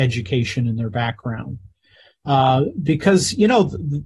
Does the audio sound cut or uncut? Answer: uncut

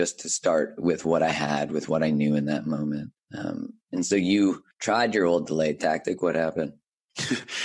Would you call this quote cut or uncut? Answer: cut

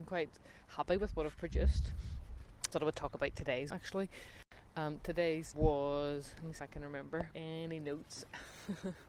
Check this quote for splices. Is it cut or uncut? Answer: cut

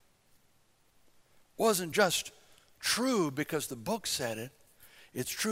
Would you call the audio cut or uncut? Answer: uncut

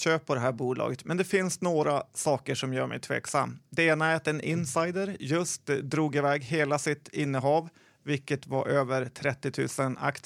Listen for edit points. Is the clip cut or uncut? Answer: uncut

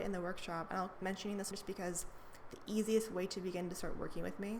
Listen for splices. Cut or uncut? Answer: cut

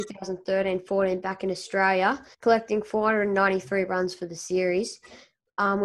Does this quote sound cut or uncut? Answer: cut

